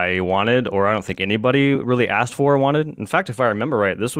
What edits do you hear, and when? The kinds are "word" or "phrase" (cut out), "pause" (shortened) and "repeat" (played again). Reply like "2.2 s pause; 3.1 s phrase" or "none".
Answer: none